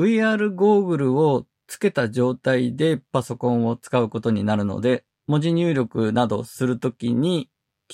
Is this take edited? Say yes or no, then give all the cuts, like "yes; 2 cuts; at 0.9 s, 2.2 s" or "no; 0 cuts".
yes; 2 cuts; at 3.1 s, 5.1 s